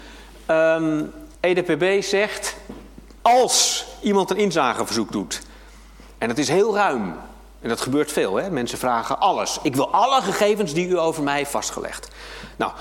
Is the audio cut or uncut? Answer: cut